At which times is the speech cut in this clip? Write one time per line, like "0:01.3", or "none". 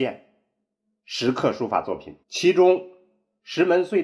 0:02.2